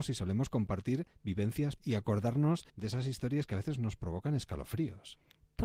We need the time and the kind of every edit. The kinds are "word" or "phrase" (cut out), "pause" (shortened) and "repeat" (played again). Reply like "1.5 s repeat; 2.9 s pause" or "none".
1.8 s word; 2.7 s pause